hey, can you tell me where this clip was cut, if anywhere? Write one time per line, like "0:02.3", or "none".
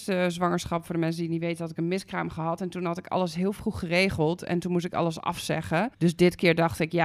0:05.9